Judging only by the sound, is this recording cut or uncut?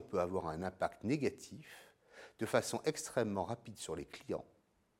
uncut